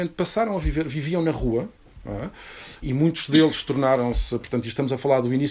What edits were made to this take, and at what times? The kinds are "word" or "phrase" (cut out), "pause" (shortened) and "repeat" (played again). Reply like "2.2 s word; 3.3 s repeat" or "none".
2.8 s word